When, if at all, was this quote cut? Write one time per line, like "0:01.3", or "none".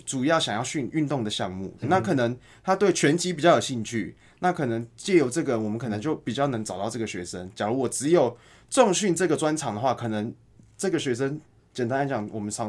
0:01.8